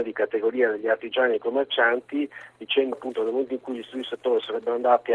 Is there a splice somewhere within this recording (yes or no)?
yes